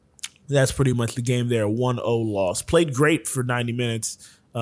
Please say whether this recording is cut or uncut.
uncut